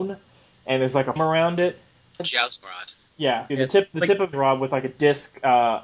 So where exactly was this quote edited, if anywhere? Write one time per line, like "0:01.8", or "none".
0:01.2
0:02.2
0:02.6
0:03.5
0:03.9
0:04.3